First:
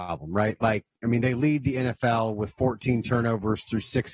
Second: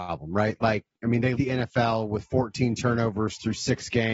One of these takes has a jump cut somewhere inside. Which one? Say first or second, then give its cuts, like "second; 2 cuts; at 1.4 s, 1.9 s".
second; 1 cut; at 1.4 s